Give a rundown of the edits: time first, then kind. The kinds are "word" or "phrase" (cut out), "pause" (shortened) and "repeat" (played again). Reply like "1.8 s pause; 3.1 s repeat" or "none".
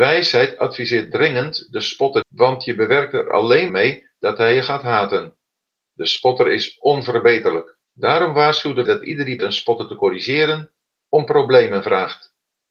2.2 s phrase; 3.7 s word; 5.7 s pause; 7.8 s pause; 8.9 s word; 9.4 s word